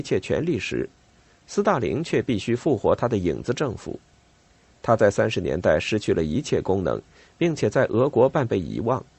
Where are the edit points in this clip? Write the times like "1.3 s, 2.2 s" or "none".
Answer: none